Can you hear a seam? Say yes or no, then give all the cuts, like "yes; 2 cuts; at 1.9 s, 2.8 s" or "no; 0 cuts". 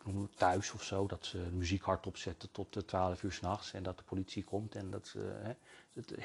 yes; 1 cut; at 4.9 s